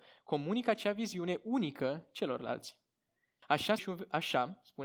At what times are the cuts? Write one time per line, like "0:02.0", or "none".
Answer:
0:03.8